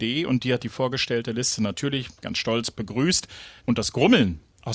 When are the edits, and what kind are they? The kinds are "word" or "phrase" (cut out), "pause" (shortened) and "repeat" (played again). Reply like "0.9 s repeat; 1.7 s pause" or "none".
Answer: 3.6 s pause